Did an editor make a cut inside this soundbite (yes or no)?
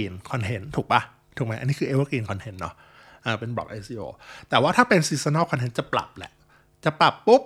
no